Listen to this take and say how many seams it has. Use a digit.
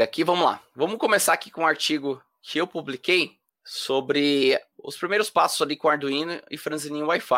1